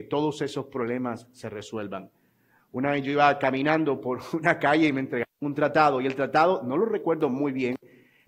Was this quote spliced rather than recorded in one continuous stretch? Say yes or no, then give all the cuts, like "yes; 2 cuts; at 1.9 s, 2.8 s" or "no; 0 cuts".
no; 0 cuts